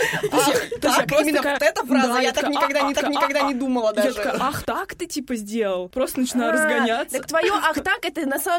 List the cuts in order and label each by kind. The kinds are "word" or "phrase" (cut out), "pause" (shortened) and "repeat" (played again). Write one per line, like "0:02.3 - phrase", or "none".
0:01.6 - word
0:02.9 - repeat
0:04.6 - word